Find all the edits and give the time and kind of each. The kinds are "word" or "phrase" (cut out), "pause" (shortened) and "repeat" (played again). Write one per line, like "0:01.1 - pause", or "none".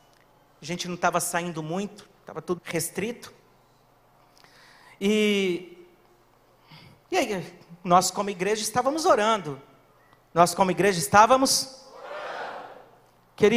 0:02.6 - word